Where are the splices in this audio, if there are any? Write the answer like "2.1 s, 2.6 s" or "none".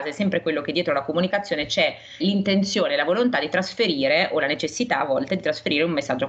2.2 s